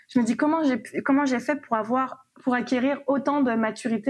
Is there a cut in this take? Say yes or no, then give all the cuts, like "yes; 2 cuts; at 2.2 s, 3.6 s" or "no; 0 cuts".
no; 0 cuts